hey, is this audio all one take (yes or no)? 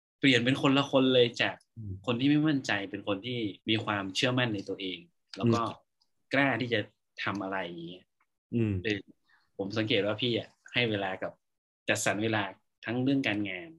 no